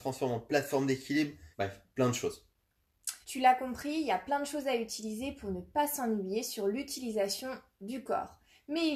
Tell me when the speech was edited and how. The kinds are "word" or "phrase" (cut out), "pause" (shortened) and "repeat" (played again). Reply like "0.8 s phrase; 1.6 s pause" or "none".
1.5 s pause; 3.2 s pause